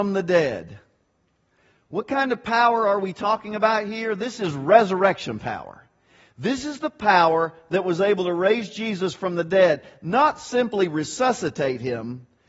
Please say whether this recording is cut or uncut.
uncut